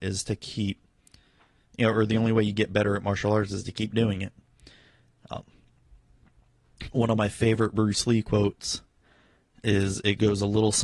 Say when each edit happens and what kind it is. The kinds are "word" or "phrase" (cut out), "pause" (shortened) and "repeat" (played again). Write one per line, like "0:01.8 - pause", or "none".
none